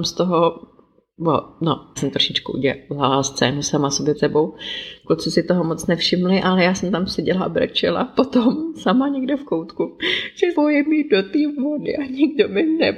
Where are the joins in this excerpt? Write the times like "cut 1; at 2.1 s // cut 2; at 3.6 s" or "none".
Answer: cut 1; at 2.0 s // cut 2; at 4.1 s // cut 3; at 10.5 s